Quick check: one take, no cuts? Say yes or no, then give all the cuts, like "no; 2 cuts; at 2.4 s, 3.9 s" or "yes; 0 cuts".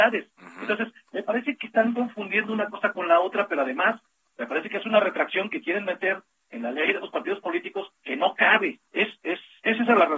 no; 1 cut; at 8.9 s